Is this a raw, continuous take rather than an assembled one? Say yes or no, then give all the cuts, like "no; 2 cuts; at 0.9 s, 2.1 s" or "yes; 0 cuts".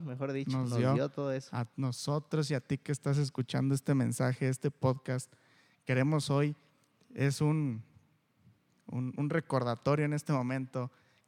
yes; 0 cuts